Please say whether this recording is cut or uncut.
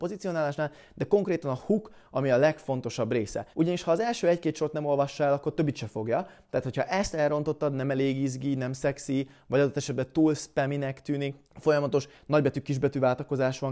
cut